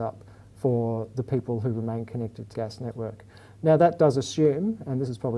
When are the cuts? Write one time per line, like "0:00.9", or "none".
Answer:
0:02.5